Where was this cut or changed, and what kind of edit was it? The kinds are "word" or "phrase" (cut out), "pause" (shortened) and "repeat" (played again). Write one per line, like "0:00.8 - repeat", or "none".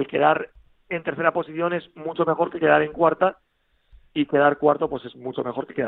none